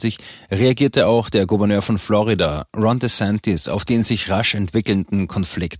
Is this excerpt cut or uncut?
uncut